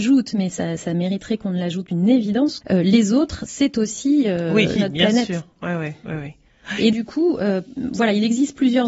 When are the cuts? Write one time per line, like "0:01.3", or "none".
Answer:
0:01.9
0:02.6
0:04.8
0:06.9